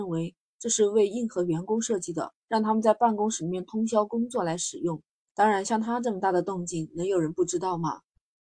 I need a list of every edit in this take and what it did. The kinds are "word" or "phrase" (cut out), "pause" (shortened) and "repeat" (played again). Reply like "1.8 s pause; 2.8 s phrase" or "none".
2.4 s pause; 5.1 s pause